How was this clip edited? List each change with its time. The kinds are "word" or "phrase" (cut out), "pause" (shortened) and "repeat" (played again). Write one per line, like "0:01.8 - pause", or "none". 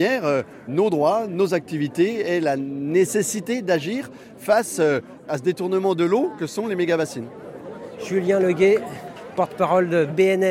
none